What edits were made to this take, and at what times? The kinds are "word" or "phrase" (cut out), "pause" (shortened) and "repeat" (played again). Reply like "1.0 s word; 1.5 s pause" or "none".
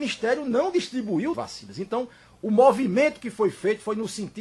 1.3 s word